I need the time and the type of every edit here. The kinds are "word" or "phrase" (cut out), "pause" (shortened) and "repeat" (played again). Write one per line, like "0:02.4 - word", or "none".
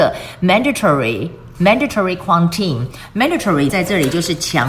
0:03.7 - word